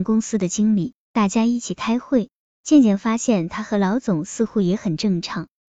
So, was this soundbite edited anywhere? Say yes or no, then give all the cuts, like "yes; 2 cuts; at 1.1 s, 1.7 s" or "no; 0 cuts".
no; 0 cuts